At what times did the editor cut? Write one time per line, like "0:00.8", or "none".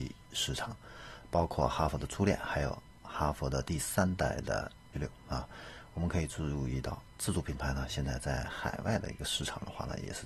0:04.9